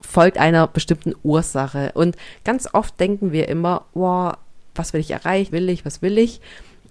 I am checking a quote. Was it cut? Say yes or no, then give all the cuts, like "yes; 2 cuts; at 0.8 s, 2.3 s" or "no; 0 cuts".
yes; 2 cuts; at 4.7 s, 5.5 s